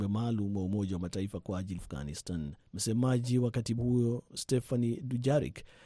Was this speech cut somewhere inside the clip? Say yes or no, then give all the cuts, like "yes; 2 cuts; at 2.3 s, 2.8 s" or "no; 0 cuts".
yes; 3 cuts; at 1.8 s, 2.7 s, 3.8 s